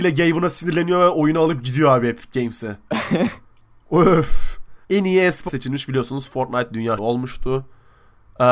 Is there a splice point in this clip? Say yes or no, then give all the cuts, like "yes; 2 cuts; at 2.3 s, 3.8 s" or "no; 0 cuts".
yes; 3 cuts; at 4.8 s, 5.5 s, 7.0 s